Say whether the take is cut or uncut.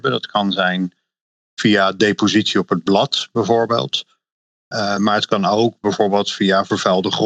uncut